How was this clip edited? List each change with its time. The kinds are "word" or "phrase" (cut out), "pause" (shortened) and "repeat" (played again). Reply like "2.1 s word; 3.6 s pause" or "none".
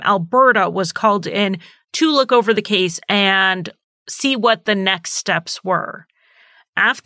none